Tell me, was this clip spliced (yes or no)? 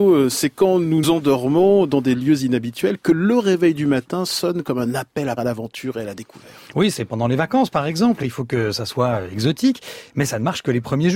yes